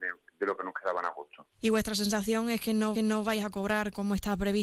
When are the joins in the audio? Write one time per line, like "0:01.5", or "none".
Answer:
0:02.9